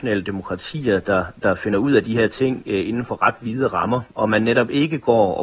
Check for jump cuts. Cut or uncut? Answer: uncut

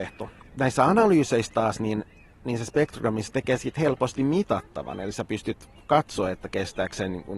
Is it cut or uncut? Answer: uncut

